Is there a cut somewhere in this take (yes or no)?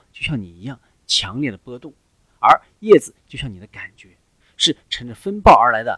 no